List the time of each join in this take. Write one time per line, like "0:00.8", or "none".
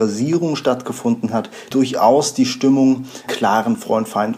0:01.7
0:03.3